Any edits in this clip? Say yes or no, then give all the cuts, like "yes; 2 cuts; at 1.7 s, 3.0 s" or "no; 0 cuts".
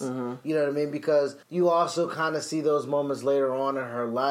yes; 1 cut; at 1.4 s